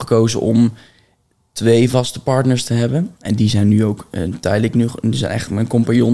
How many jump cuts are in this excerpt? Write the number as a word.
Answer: zero